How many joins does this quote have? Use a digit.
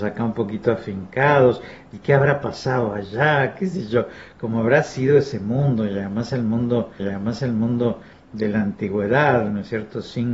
1